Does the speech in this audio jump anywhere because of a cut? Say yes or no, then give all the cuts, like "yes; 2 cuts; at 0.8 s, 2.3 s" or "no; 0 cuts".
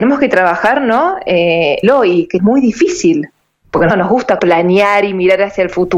yes; 4 cuts; at 1.8 s, 2.4 s, 3.9 s, 4.4 s